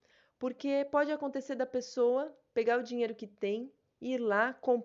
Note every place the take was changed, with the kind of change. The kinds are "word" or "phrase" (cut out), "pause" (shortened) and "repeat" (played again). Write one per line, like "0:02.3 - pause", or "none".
none